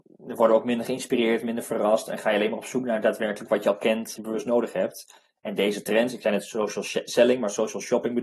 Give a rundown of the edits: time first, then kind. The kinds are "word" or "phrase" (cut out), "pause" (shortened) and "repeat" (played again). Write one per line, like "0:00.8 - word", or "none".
0:04.1 - phrase